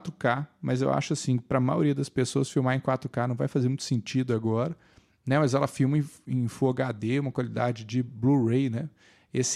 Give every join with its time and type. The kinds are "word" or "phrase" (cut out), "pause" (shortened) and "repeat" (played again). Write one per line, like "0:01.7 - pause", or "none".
none